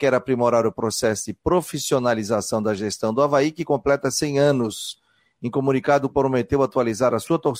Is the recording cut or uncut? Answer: cut